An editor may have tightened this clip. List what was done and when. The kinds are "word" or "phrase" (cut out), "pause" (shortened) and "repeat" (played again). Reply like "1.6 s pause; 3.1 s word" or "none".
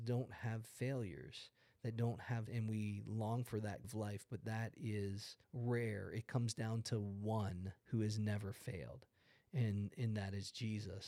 2.5 s word; 3.8 s word; 5.4 s pause; 7.8 s pause